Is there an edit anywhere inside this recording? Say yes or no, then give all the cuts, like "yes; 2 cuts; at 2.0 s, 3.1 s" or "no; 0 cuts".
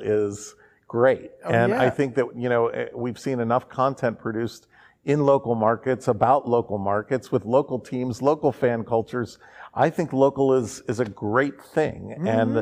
no; 0 cuts